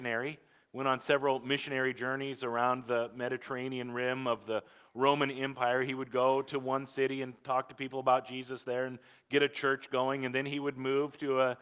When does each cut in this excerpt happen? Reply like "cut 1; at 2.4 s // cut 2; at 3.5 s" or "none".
none